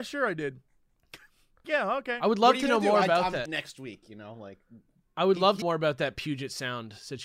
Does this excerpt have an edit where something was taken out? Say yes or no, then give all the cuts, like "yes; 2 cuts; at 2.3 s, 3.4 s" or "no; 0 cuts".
yes; 4 cuts; at 1.6 s, 3.5 s, 5.1 s, 5.6 s